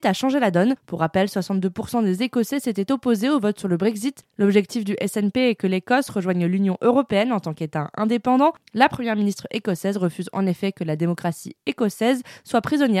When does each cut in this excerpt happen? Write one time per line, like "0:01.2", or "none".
none